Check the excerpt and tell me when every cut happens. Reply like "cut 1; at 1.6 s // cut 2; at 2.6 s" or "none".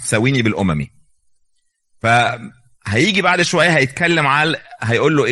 none